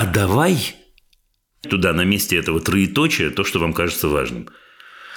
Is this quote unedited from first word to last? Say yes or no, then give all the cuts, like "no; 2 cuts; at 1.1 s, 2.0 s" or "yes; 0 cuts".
no; 1 cut; at 1.6 s